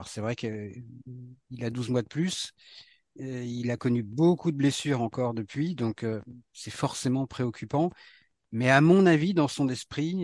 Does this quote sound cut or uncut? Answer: uncut